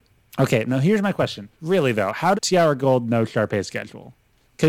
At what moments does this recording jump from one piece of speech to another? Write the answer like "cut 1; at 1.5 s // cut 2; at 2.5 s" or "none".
cut 1; at 1.5 s // cut 2; at 2.3 s